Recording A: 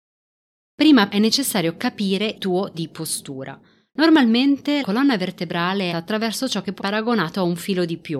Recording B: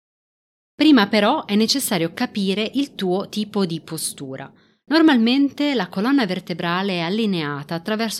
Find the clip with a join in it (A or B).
A